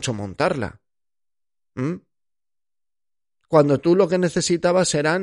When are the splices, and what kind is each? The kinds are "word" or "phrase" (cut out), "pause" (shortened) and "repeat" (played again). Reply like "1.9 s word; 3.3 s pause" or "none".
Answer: none